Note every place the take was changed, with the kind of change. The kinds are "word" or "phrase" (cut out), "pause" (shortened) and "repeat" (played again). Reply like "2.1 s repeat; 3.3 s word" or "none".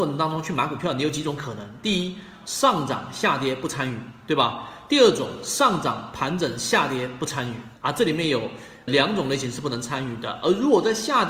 7.8 s pause; 8.9 s word